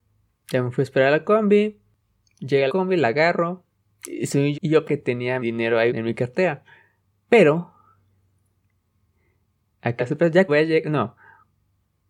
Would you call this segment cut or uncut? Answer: cut